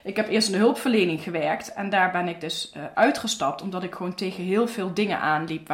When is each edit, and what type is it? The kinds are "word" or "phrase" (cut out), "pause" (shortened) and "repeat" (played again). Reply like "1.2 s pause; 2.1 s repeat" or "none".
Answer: none